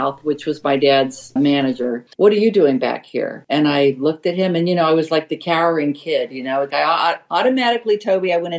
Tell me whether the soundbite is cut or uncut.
cut